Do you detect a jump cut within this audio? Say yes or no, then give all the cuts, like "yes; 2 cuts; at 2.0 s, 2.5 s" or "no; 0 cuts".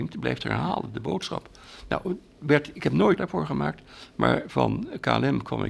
yes; 1 cut; at 3.2 s